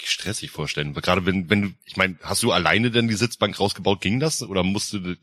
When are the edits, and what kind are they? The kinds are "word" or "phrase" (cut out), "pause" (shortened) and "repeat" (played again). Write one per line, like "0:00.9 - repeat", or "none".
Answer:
0:01.8 - pause